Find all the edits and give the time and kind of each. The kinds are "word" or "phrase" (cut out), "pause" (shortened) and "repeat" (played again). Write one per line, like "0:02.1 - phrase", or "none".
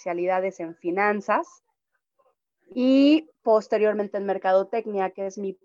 none